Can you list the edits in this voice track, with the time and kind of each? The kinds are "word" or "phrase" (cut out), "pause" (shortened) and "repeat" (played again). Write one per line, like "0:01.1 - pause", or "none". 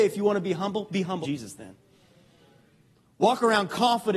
0:01.2 - word